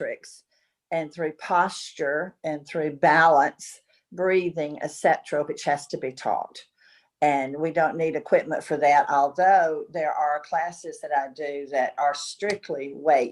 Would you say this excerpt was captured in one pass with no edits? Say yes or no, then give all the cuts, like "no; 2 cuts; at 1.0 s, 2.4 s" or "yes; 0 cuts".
yes; 0 cuts